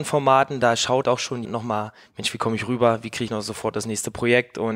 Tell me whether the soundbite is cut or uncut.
cut